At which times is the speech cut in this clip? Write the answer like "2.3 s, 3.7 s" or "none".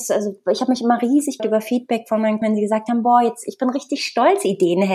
1.4 s, 2.4 s